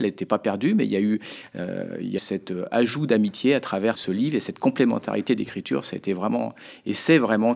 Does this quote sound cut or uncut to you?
cut